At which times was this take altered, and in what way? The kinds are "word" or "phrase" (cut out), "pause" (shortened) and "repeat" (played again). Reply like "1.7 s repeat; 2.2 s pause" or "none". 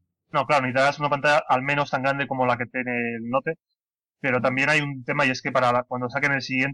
none